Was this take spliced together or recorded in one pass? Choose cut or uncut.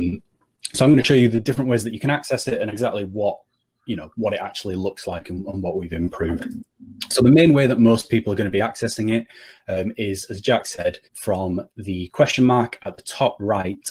cut